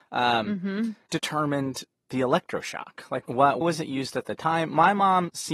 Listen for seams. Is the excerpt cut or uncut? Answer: cut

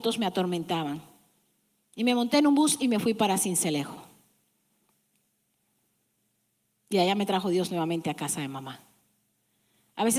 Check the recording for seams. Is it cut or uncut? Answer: uncut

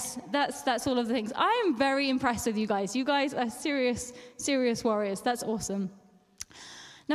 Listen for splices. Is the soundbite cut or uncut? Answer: uncut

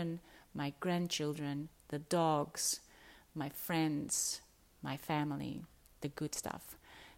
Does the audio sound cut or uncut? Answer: uncut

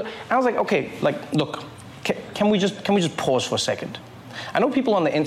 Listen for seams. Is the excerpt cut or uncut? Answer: uncut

